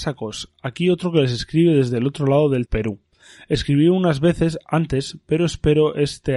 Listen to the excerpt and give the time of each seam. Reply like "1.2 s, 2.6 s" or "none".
2.7 s